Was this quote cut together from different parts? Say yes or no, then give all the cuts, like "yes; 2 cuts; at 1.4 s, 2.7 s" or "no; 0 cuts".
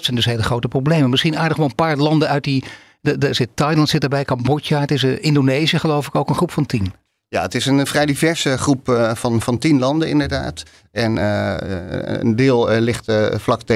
no; 0 cuts